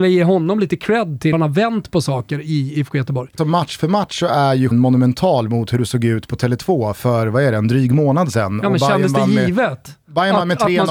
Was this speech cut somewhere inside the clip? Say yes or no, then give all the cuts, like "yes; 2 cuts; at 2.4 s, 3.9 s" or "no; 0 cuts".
yes; 3 cuts; at 1.3 s, 3.4 s, 4.7 s